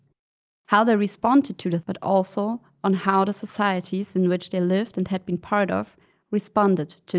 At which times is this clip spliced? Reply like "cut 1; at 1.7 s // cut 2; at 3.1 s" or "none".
cut 1; at 1.8 s